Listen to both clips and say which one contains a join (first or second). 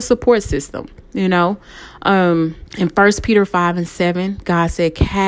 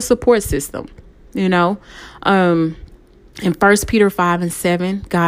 first